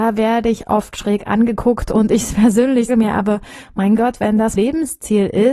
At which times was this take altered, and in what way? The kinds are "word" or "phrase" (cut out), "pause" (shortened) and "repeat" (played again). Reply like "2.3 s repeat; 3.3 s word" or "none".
2.9 s word; 4.6 s word